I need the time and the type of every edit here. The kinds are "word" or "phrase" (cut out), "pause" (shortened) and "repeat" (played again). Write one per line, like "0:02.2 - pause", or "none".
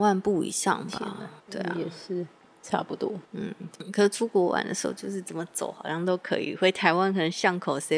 0:01.4 - phrase
0:03.2 - pause